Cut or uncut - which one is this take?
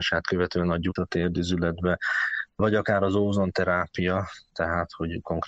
cut